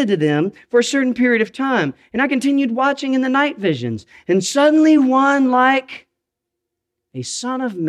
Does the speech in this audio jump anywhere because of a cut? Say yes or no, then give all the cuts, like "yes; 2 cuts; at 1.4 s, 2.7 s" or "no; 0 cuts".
no; 0 cuts